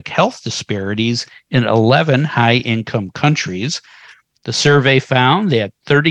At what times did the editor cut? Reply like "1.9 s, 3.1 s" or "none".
none